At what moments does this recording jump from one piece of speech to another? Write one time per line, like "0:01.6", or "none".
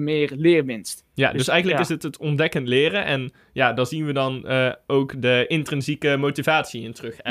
none

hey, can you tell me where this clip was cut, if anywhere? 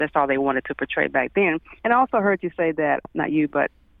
0:01.8
0:03.0

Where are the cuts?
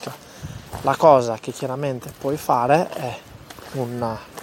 none

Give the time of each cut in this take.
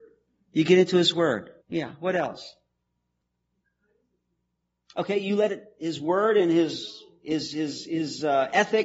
0:01.6

